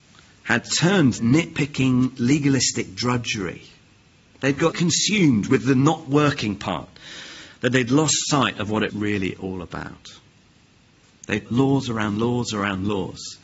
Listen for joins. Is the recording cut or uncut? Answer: cut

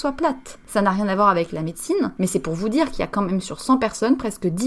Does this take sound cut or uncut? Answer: uncut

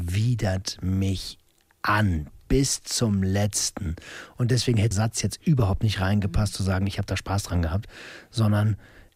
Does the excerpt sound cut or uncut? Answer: cut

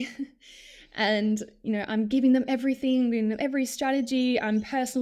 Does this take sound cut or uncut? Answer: uncut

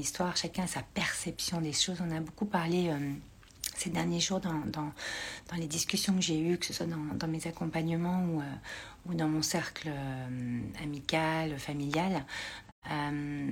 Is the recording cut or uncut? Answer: uncut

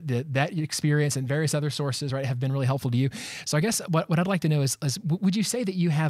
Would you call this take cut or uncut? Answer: uncut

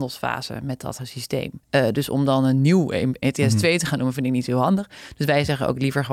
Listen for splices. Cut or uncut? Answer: cut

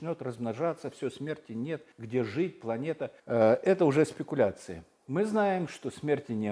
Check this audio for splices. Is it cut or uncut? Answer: cut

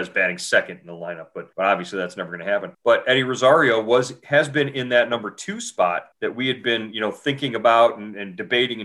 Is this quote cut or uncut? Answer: cut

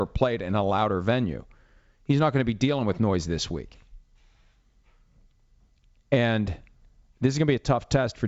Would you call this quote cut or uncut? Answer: uncut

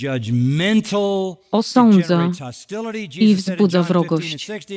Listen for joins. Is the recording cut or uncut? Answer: uncut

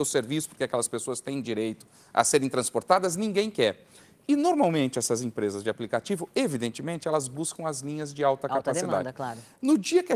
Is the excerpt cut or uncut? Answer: uncut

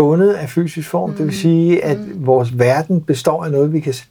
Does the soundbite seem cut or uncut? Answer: uncut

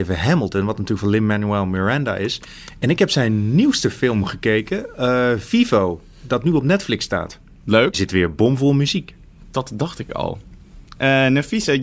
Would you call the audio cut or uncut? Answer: cut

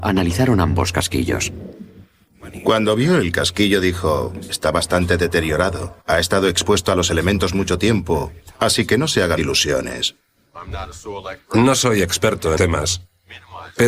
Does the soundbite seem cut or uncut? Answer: cut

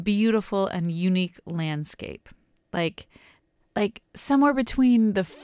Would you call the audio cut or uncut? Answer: uncut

